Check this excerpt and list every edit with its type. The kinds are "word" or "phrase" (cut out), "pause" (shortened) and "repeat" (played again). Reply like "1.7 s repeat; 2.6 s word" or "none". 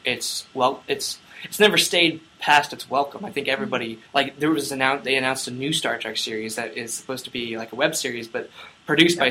4.1 s pause